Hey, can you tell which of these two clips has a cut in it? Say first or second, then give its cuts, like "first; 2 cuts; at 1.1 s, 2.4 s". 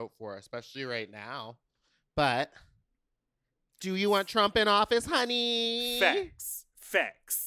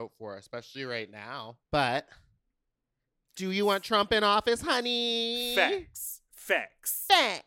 second; 1 cut; at 1.7 s